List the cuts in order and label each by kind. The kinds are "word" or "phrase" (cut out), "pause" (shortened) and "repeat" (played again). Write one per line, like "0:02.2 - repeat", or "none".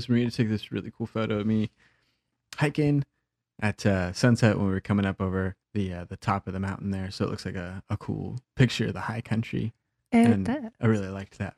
0:05.6 - pause